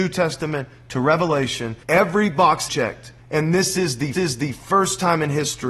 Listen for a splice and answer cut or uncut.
cut